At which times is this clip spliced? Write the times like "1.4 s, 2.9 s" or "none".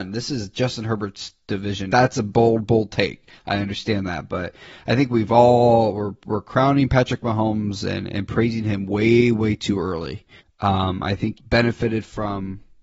1.9 s, 10.4 s, 11.4 s